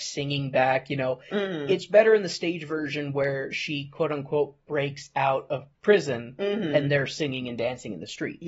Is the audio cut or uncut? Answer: cut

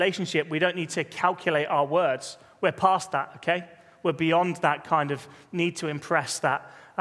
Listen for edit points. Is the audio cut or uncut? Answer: uncut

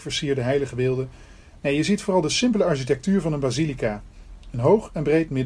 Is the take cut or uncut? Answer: uncut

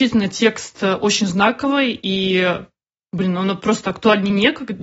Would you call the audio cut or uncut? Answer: uncut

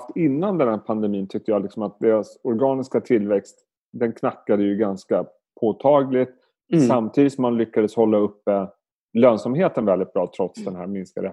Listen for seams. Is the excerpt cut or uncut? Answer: uncut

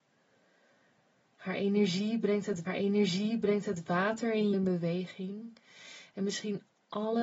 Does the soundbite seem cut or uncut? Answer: cut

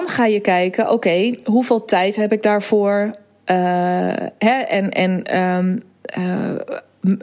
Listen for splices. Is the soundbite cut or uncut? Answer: uncut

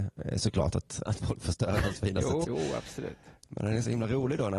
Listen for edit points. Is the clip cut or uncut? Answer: cut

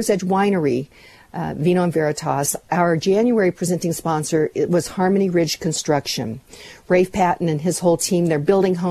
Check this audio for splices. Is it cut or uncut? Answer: uncut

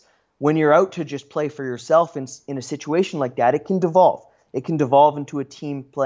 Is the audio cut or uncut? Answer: uncut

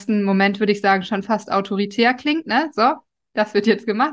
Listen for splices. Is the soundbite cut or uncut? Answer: uncut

